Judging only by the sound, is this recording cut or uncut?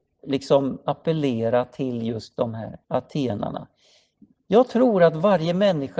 cut